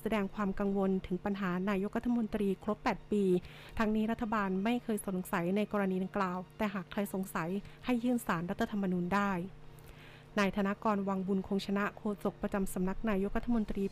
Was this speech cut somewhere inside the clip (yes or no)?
no